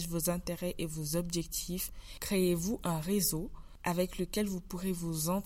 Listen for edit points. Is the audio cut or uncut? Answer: uncut